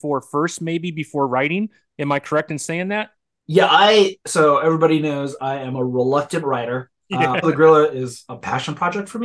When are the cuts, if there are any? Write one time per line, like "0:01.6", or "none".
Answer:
0:04.2
0:07.4